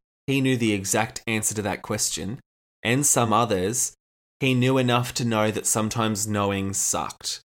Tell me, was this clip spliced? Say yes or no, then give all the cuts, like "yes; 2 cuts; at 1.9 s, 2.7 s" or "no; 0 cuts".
no; 0 cuts